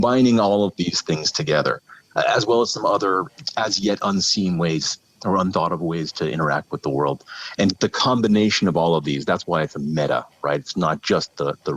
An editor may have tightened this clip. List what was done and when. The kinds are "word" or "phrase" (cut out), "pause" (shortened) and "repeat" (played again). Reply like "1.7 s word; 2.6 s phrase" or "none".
none